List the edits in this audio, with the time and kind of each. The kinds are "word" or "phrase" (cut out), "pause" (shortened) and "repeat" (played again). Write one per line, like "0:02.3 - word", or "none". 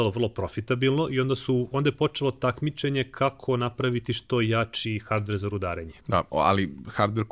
0:06.0 - pause